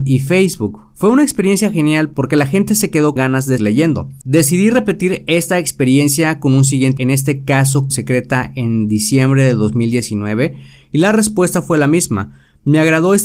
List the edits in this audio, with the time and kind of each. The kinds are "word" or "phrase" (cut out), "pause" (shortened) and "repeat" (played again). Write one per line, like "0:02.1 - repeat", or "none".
0:03.2 - word
0:03.6 - word
0:07.0 - word
0:07.9 - word